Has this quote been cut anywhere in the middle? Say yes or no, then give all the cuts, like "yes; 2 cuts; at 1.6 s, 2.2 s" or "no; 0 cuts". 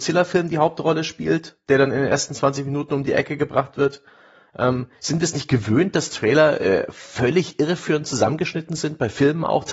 no; 0 cuts